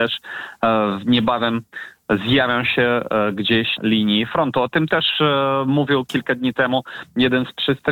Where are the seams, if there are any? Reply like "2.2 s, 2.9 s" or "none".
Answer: 3.8 s